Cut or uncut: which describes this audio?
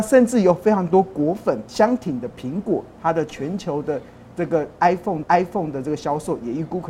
cut